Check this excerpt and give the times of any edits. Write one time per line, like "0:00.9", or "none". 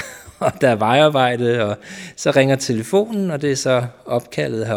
none

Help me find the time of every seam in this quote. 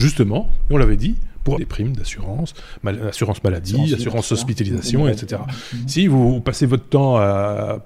0:01.6

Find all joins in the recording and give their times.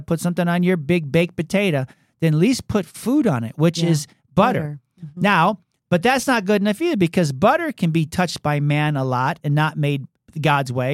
none

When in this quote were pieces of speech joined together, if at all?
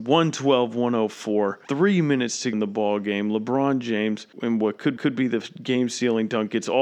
0:01.6
0:02.5
0:04.3
0:05.0

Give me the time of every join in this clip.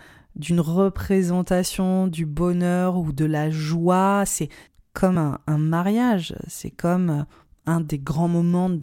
none

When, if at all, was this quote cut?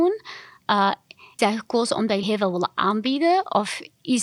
0:01.4
0:02.2

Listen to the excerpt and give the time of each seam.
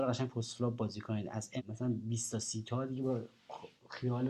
0:01.6

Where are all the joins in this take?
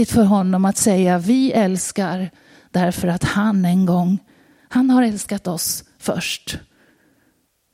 none

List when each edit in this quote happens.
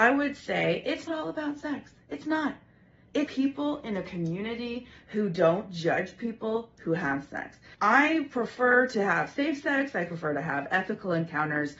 0:01.1
0:03.3

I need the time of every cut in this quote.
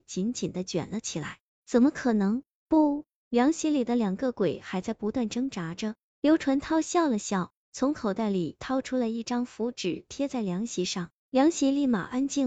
none

